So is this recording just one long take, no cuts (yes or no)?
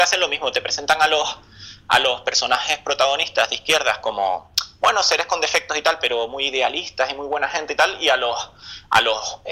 yes